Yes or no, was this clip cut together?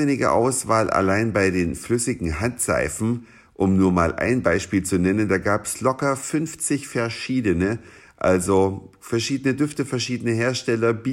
no